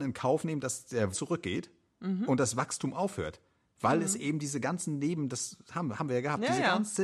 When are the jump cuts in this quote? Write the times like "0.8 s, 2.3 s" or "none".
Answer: 1.1 s